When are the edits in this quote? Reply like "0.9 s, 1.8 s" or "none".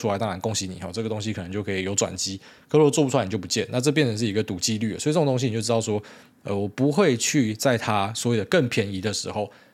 none